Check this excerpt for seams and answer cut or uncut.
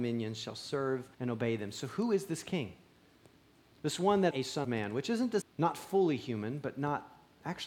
cut